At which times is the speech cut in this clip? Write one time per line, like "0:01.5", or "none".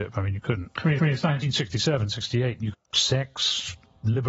0:01.0
0:02.7